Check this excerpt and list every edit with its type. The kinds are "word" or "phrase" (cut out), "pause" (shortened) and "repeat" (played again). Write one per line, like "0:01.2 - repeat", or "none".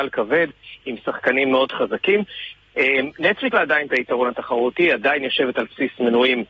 0:03.5 - word

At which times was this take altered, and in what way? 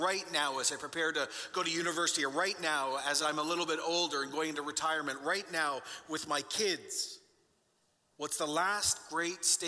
none

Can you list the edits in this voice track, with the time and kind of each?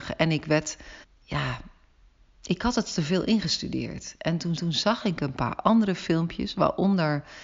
0:01.0 - pause
0:04.6 - repeat

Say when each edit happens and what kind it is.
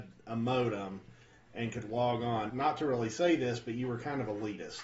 0:02.5 - word

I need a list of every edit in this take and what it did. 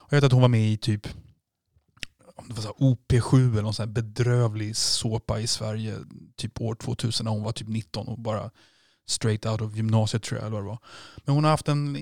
none

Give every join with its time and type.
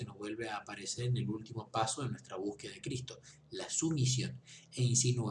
none

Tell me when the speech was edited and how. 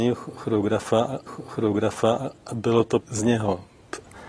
0:01.3 - repeat
0:03.0 - phrase

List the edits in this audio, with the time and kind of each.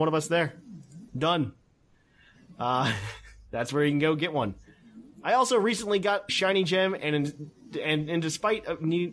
0:01.1 - pause
0:06.3 - word

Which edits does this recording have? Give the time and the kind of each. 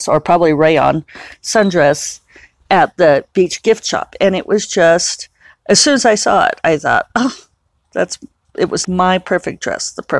0:08.8 - word

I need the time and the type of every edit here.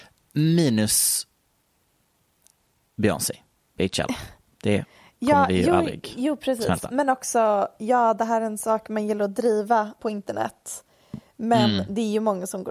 0:10.0 - word

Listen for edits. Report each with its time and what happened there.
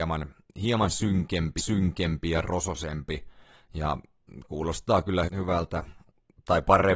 0:01.6 - repeat
0:05.3 - word

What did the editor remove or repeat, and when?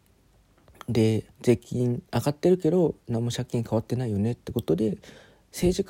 0:01.3 - pause

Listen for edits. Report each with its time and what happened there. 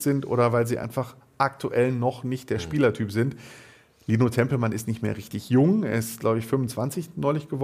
none

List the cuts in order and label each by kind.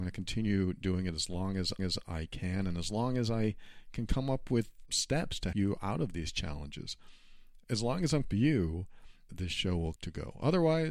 0:01.8 - repeat
0:04.9 - word
0:05.5 - word
0:08.2 - phrase
0:09.3 - word
0:10.0 - word

